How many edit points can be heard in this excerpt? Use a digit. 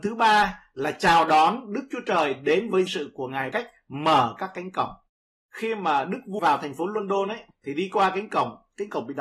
3